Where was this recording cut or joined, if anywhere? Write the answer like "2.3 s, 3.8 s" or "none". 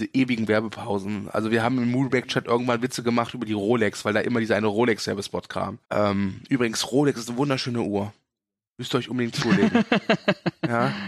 5.8 s